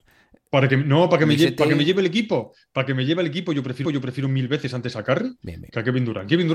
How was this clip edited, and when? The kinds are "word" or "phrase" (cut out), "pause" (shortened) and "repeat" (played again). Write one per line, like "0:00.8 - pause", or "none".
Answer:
0:03.8 - repeat